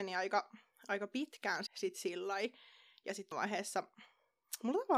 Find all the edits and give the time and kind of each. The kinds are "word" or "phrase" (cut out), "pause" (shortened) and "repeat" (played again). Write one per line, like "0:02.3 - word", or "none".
0:01.7 - word
0:03.3 - word